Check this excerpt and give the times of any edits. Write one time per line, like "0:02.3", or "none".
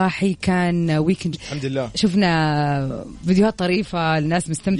0:01.3